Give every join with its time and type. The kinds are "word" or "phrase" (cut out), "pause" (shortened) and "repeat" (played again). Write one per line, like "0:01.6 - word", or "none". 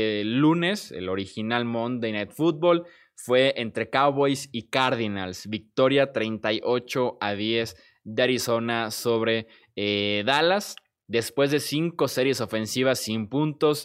none